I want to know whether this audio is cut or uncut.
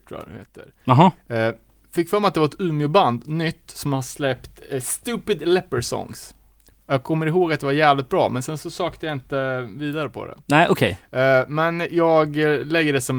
uncut